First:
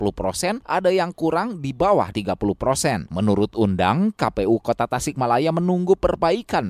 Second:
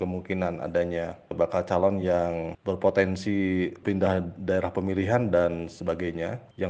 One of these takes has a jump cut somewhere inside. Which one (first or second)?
first